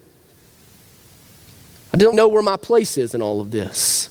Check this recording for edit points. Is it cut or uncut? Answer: cut